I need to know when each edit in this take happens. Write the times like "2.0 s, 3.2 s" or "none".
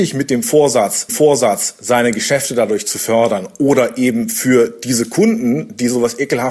1.1 s